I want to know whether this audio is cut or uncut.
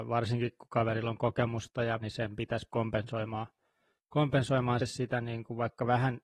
cut